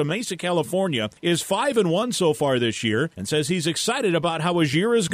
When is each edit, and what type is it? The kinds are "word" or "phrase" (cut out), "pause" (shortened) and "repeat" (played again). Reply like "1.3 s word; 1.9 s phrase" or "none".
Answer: 1.2 s pause; 3.1 s pause